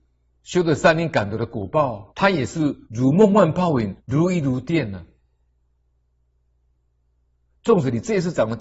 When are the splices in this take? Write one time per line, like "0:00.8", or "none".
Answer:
0:02.1
0:02.8
0:04.0